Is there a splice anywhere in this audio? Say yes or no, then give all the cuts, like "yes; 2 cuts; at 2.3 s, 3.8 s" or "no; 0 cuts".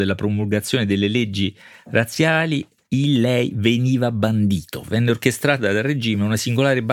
no; 0 cuts